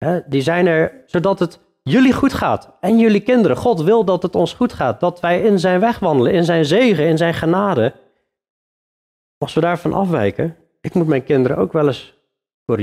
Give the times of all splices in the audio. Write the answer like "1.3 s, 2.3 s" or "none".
none